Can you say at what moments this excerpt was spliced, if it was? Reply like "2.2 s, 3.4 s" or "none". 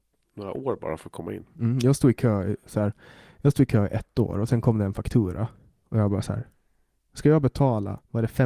none

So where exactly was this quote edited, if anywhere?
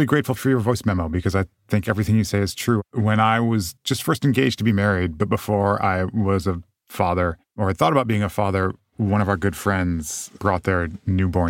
3.8 s

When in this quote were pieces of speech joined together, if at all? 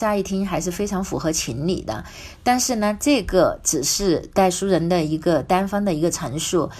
none

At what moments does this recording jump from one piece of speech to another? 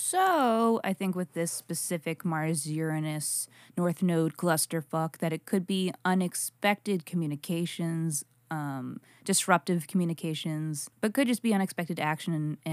none

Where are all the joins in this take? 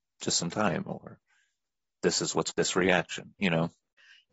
2.5 s

